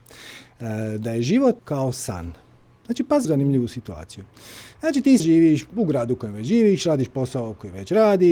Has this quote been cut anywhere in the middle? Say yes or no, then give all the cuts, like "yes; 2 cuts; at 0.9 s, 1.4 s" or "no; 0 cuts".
yes; 3 cuts; at 1.6 s, 3.2 s, 5.2 s